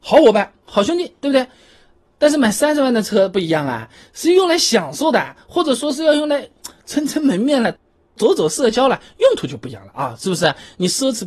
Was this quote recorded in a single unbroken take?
yes; 0 cuts

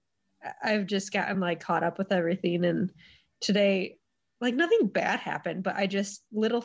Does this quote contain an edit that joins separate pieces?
no; 0 cuts

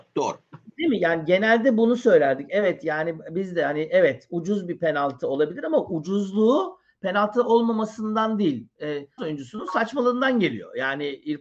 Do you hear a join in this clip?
yes; 1 cut; at 9.2 s

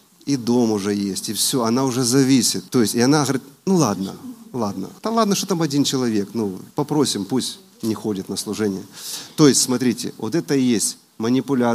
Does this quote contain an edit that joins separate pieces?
yes; 3 cuts; at 2.7 s, 5.0 s, 6.7 s

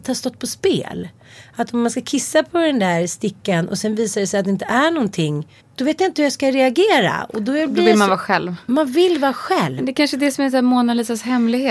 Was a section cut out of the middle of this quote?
yes; 1 cut; at 5.6 s

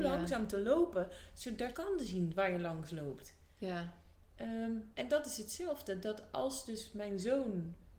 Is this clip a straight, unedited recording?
no; 1 cut; at 1.7 s

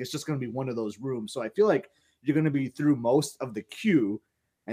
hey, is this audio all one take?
yes; 0 cuts

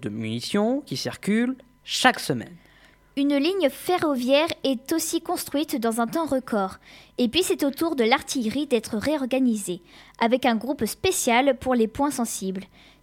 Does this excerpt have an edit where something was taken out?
no; 0 cuts

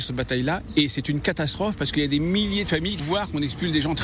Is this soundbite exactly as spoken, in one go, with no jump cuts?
no; 1 cut; at 3.0 s

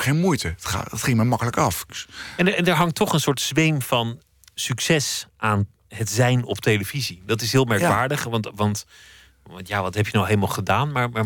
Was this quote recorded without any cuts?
yes; 0 cuts

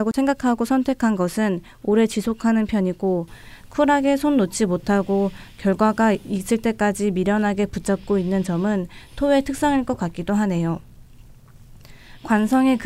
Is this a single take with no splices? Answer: yes; 0 cuts

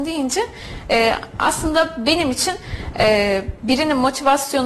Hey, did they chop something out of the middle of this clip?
no; 0 cuts

